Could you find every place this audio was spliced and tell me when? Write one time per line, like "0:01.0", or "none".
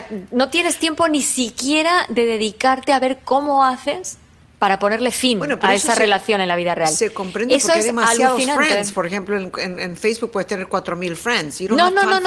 none